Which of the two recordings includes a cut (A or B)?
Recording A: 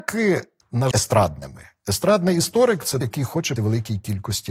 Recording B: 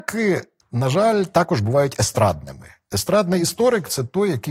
A